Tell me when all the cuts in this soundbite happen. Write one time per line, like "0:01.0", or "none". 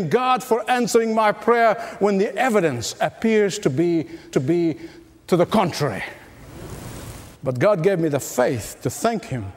0:04.3
0:07.4